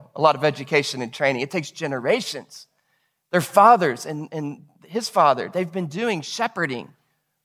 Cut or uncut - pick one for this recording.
uncut